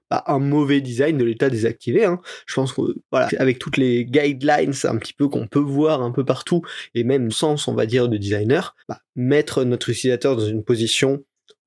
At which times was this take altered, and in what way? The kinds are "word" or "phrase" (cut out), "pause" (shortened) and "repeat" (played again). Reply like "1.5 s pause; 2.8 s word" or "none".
3.3 s word; 7.3 s phrase; 8.8 s pause